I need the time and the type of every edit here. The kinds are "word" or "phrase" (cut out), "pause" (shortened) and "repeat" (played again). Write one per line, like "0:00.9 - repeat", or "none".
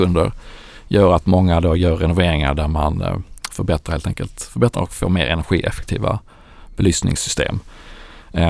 0:04.7 - word